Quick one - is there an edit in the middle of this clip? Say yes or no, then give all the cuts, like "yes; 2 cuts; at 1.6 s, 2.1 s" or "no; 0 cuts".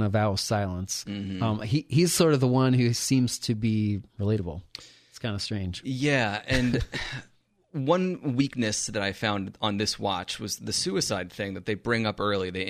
no; 0 cuts